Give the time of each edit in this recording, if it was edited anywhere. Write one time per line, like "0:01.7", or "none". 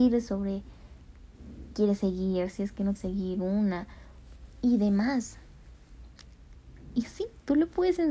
0:01.7
0:02.9